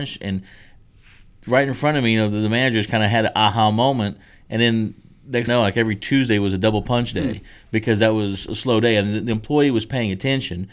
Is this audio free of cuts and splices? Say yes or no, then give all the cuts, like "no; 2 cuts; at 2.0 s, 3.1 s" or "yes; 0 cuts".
no; 1 cut; at 5.5 s